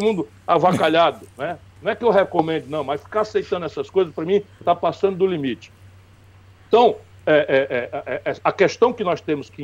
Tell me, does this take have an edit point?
no; 0 cuts

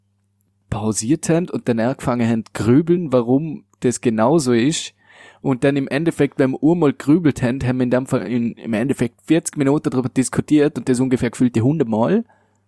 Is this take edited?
no; 0 cuts

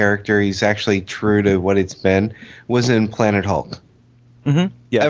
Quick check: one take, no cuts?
yes; 0 cuts

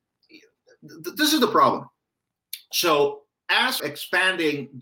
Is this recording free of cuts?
no; 1 cut; at 3.8 s

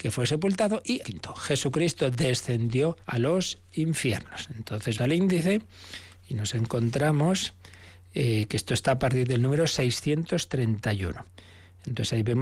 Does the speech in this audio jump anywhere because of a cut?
yes; 3 cuts; at 1.0 s, 3.0 s, 5.0 s

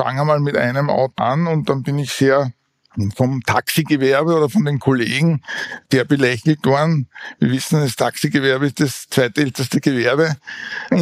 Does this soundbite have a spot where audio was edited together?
yes; 1 cut; at 1.2 s

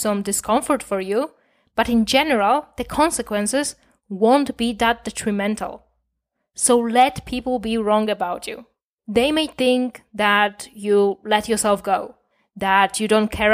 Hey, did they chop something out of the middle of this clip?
no; 0 cuts

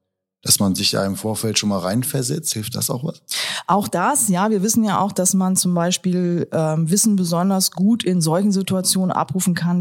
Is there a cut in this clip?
no; 0 cuts

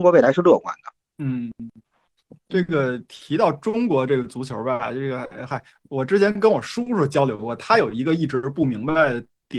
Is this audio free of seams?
yes; 0 cuts

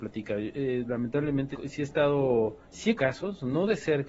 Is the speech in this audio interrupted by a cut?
yes; 3 cuts; at 1.5 s, 2.6 s, 3.0 s

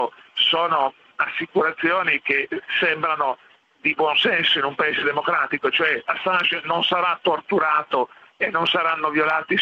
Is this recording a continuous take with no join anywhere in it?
yes; 0 cuts

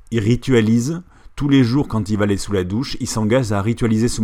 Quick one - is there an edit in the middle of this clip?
no; 0 cuts

